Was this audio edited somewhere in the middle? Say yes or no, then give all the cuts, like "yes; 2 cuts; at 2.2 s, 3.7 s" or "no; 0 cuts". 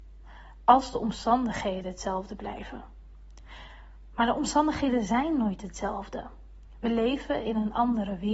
no; 0 cuts